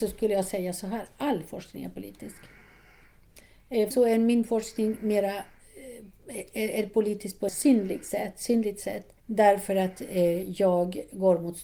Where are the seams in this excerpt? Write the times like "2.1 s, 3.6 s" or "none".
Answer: 3.9 s, 7.5 s, 9.2 s